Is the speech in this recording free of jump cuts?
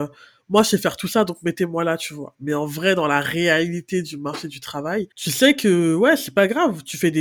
no; 1 cut; at 5.1 s

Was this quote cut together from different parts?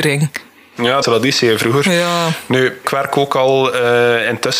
yes; 2 cuts; at 1.0 s, 2.8 s

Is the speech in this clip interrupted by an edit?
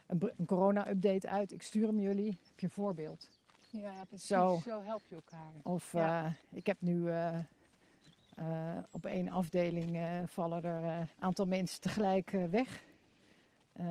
yes; 2 cuts; at 6.4 s, 11.1 s

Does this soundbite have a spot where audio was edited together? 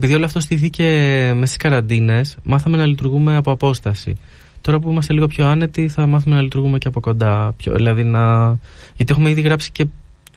no; 0 cuts

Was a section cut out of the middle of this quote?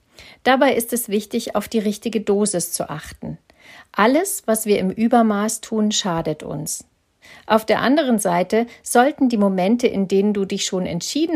no; 0 cuts

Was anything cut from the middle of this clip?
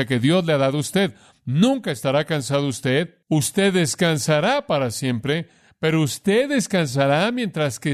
yes; 1 cut; at 3.2 s

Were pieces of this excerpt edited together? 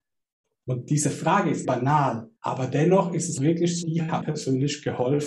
yes; 5 cuts; at 1.6 s, 2.4 s, 3.4 s, 3.8 s, 4.2 s

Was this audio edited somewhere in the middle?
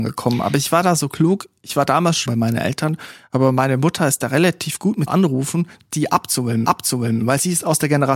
yes; 3 cuts; at 2.3 s, 5.1 s, 6.6 s

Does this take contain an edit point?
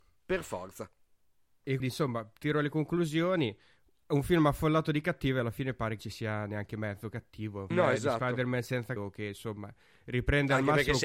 yes; 4 cuts; at 1.8 s, 6.0 s, 7.7 s, 9.0 s

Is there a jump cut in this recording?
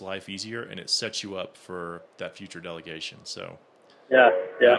no; 0 cuts

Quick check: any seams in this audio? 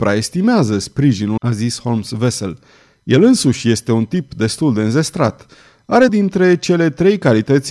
yes; 2 cuts; at 1.4 s, 6.1 s

